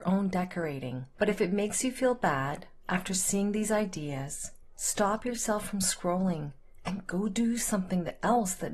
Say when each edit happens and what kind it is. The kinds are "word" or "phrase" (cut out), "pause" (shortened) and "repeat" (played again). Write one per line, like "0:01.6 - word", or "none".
0:01.1 - pause
0:04.7 - pause